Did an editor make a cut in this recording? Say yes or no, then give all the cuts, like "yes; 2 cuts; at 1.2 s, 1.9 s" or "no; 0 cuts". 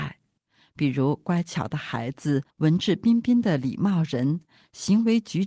yes; 1 cut; at 2.5 s